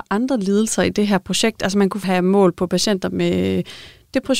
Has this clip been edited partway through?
yes; 1 cut; at 2.0 s

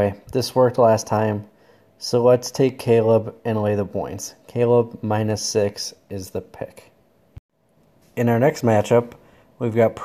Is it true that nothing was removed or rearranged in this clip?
yes; 0 cuts

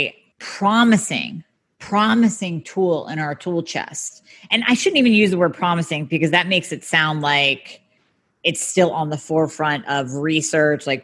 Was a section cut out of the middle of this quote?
no; 0 cuts

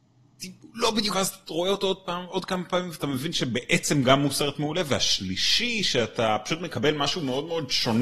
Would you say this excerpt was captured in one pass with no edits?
no; 1 cut; at 1.1 s

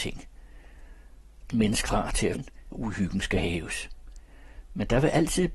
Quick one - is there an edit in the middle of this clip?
yes; 4 cuts; at 1.5 s, 1.9 s, 2.3 s, 2.7 s

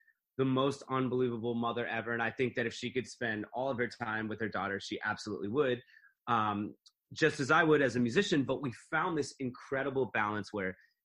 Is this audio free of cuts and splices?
yes; 0 cuts

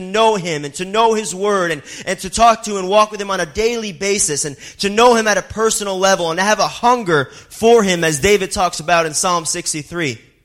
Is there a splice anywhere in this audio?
no; 0 cuts

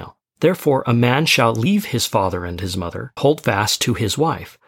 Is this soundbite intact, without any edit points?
no; 1 cut; at 3.2 s

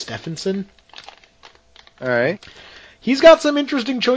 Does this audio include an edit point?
no; 0 cuts

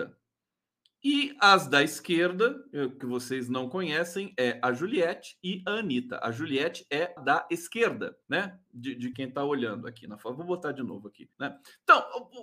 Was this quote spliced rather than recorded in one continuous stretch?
yes; 5 cuts; at 3.0 s, 7.2 s, 8.2 s, 9.1 s, 11.3 s

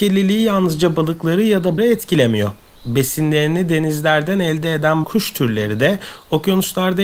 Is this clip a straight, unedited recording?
no; 2 cuts; at 1.8 s, 5.0 s

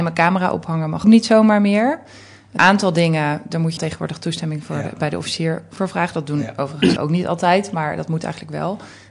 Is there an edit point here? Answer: yes; 5 cuts; at 1.0 s, 2.6 s, 3.8 s, 5.8 s, 7.0 s

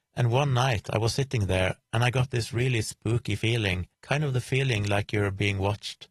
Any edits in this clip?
yes; 1 cut; at 3.9 s

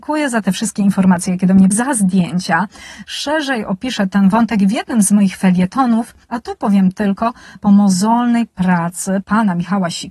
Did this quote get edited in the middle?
yes; 3 cuts; at 1.7 s, 6.2 s, 7.6 s

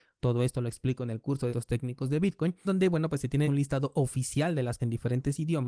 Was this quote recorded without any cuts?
no; 4 cuts; at 1.5 s, 2.6 s, 3.4 s, 4.8 s

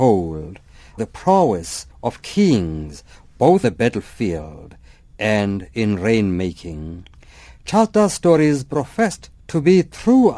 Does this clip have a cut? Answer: yes; 4 cuts; at 1.0 s, 1.9 s, 3.6 s, 9.4 s

